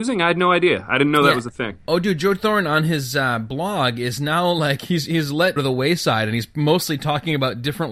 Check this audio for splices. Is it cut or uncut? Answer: cut